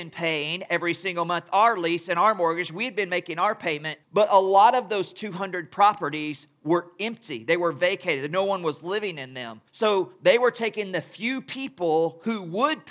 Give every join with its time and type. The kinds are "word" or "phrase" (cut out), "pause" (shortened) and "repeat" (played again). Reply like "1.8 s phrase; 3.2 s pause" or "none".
4.0 s pause; 9.7 s pause

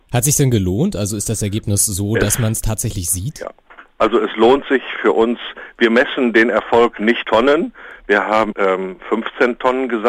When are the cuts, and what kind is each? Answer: 7.2 s word; 8.5 s word

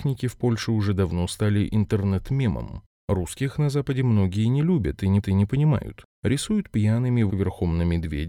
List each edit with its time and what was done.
5.2 s repeat; 7.3 s word

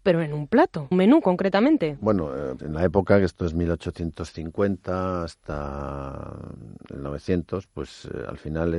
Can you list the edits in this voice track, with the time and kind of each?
0.9 s phrase; 2.6 s word

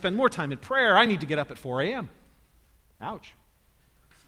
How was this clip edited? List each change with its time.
none

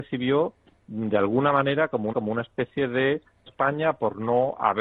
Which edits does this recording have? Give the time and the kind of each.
2.1 s repeat; 3.5 s phrase

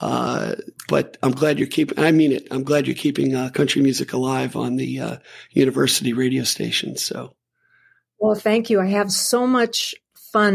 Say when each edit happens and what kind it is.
none

